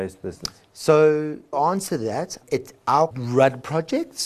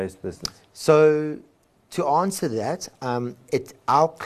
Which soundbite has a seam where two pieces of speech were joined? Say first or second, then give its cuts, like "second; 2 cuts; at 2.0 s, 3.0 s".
first; 3 cuts; at 1.5 s, 2.4 s, 3.1 s